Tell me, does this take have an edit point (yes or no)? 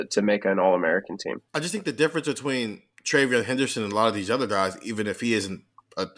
yes